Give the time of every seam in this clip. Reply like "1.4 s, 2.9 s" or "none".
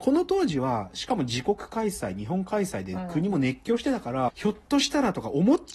4.3 s